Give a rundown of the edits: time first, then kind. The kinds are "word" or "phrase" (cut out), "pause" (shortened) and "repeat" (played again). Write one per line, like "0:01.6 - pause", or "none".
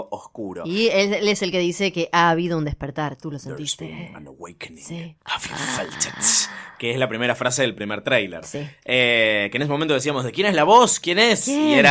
none